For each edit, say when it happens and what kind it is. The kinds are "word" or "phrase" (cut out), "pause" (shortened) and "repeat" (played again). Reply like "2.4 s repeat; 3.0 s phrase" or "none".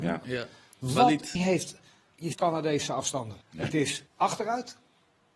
1.4 s word; 2.3 s phrase; 3.4 s pause; 4.1 s pause

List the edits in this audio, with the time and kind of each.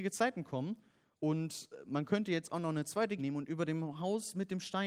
3.2 s word

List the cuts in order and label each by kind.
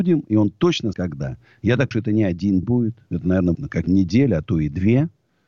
0.9 s word; 1.9 s word; 2.6 s word; 3.5 s word; 3.9 s word

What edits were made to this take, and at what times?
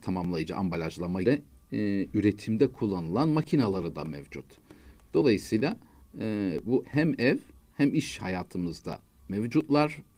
1.2 s phrase; 6.8 s phrase

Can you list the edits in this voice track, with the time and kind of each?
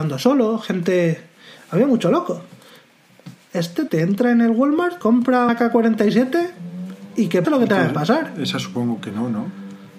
3.9 s word; 5.0 s word; 5.5 s word; 7.4 s word

